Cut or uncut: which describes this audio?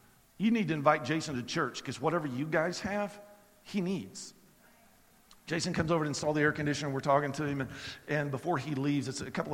uncut